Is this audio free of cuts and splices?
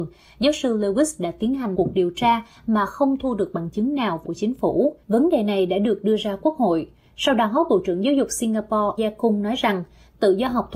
no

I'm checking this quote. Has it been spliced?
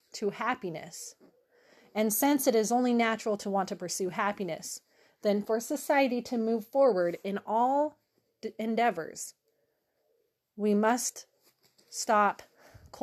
no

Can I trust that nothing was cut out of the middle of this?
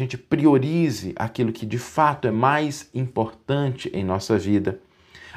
yes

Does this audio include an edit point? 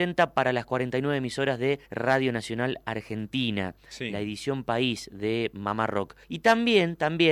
yes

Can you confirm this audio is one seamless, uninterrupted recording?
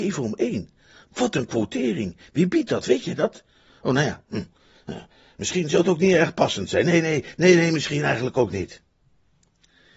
yes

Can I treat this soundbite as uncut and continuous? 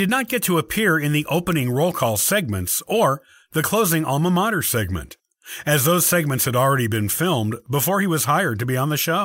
yes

